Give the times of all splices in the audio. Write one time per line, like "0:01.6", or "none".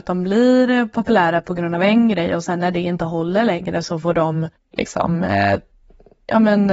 0:04.5